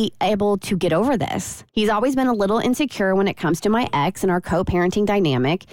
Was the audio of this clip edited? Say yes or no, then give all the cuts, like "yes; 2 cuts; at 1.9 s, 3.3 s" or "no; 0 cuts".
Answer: yes; 1 cut; at 1.7 s